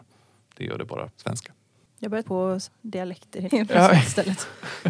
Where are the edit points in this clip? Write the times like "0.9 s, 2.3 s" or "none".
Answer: 1.1 s, 2.2 s, 2.7 s, 3.5 s